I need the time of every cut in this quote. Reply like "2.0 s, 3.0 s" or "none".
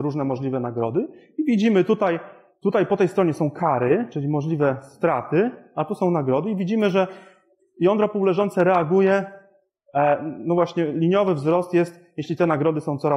none